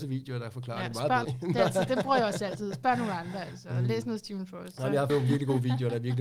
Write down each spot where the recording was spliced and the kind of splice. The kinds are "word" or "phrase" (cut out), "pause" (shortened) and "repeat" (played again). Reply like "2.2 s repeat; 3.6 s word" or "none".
1.2 s phrase; 5.1 s word